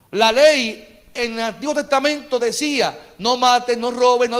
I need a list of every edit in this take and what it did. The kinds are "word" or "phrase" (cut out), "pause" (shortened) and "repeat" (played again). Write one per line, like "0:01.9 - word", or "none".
none